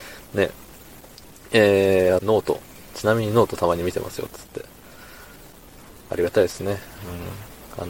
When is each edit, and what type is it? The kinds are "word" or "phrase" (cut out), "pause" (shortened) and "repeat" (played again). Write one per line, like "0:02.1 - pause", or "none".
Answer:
0:02.2 - phrase